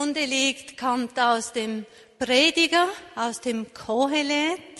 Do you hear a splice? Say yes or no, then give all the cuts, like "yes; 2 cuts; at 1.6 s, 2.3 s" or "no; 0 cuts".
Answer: no; 0 cuts